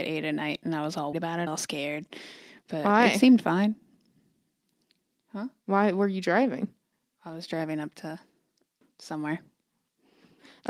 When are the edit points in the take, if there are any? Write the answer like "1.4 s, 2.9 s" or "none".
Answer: 1.1 s, 1.5 s, 8.8 s